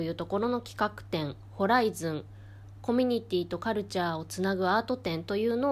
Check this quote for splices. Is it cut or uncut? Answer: uncut